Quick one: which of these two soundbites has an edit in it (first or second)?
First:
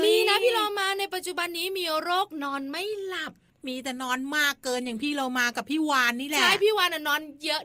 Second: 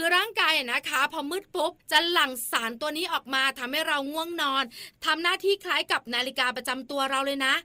second